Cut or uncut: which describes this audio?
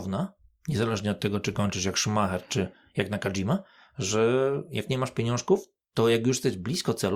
uncut